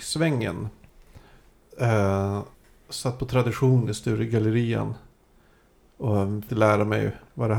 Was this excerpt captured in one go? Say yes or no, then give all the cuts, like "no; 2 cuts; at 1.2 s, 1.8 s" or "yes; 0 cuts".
no; 2 cuts; at 2.5 s, 6.5 s